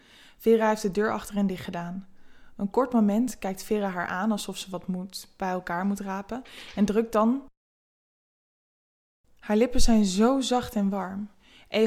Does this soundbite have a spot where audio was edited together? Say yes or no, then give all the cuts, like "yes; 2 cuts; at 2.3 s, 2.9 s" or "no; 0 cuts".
no; 0 cuts